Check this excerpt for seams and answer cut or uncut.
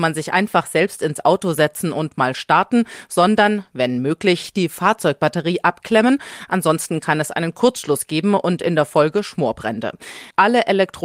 uncut